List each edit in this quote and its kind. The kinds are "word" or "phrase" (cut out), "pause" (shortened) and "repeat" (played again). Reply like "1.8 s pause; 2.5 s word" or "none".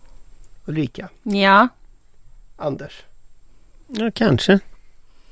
none

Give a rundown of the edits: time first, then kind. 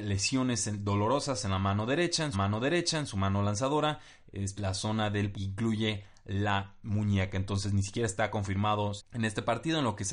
2.3 s repeat; 4.6 s word; 5.3 s word; 9.0 s phrase

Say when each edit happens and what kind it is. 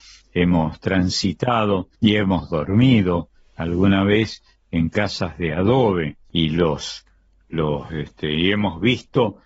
none

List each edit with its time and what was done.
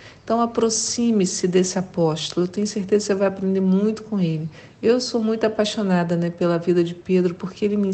none

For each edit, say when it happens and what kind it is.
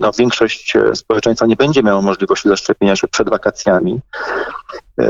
none

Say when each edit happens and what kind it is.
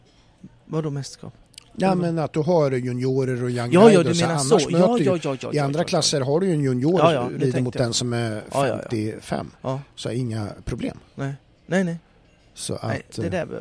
9.6 s pause

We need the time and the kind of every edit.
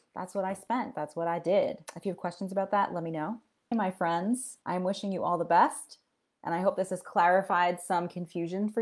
4.6 s pause

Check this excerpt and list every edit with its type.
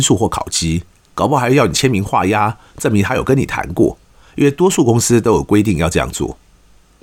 none

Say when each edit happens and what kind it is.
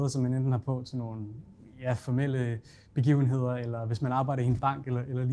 none

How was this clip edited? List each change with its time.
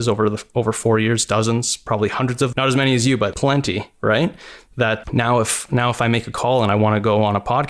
2.5 s word; 3.3 s word; 5.0 s word

